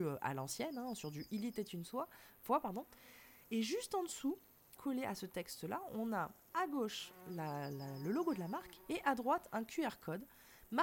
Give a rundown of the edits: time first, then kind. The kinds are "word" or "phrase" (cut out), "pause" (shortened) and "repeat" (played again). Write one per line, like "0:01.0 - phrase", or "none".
0:04.8 - word